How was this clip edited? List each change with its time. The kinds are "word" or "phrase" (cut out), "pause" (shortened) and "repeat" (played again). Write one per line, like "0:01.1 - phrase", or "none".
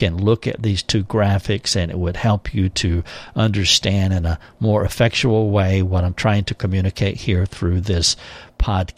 none